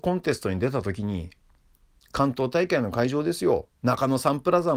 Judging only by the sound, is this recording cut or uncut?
uncut